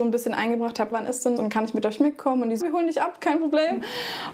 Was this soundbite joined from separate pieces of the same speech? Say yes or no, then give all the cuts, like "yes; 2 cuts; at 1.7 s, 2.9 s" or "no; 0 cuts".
yes; 3 cuts; at 0.9 s, 1.4 s, 2.6 s